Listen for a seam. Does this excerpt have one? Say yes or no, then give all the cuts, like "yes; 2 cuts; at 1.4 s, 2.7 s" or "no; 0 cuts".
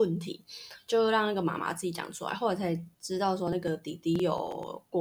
yes; 1 cut; at 2.9 s